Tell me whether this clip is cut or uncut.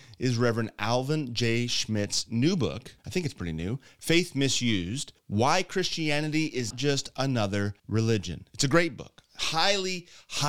cut